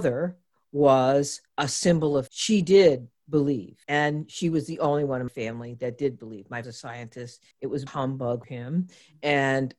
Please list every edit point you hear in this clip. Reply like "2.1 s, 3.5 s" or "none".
1.5 s, 2.3 s, 3.8 s, 5.3 s, 6.6 s, 7.5 s, 7.9 s, 8.4 s